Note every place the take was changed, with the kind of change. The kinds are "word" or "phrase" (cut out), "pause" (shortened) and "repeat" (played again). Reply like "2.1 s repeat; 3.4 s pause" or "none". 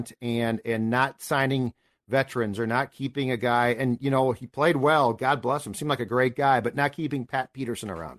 none